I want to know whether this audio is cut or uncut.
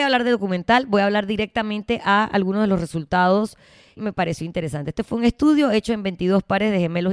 cut